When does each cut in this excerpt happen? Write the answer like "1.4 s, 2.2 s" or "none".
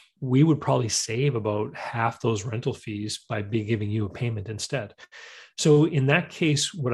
none